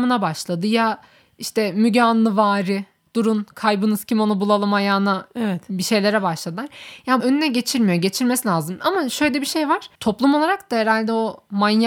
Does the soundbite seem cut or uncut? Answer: cut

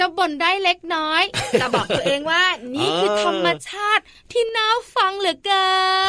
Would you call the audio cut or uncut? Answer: uncut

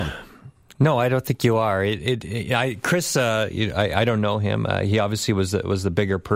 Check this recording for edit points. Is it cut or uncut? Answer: uncut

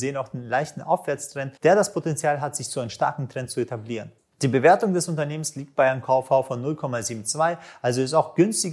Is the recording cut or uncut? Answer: cut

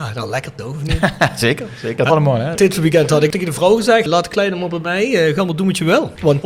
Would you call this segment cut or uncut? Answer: cut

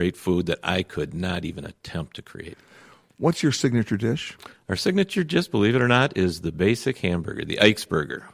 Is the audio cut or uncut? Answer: uncut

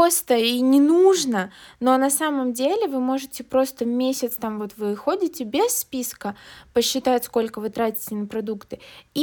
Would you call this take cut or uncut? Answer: uncut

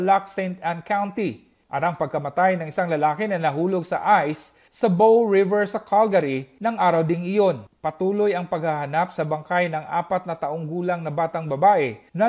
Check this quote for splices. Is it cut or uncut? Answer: uncut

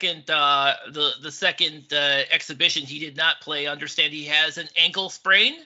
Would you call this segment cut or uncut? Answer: uncut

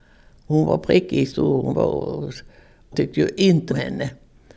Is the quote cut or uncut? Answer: cut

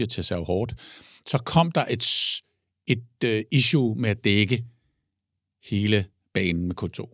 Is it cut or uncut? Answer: uncut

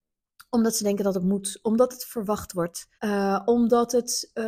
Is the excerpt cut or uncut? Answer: cut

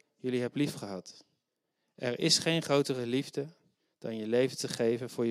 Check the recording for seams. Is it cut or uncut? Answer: uncut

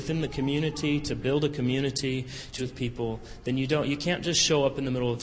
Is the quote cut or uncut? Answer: cut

